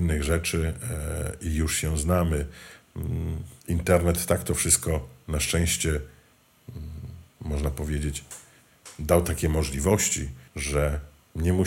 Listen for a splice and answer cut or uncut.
cut